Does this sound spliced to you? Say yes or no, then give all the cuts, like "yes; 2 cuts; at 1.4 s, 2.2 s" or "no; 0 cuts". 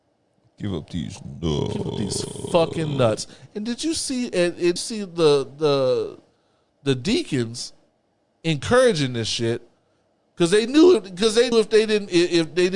yes; 2 cuts; at 4.8 s, 11.5 s